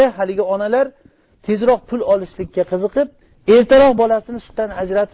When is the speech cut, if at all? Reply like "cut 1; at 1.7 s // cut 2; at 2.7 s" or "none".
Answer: none